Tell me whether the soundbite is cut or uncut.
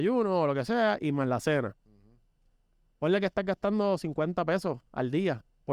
uncut